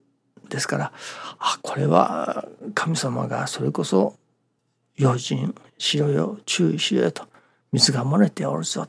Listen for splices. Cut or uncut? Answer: cut